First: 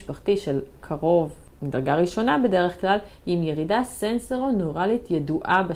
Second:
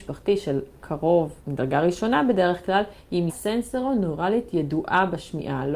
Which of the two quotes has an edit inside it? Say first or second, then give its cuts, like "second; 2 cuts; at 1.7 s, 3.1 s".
second; 2 cuts; at 1.4 s, 3.3 s